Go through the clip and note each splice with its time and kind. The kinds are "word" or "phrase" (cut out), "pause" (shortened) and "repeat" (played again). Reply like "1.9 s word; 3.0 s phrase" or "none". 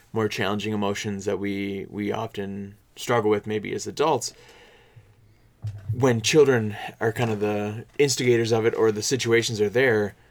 2.8 s pause; 7.9 s pause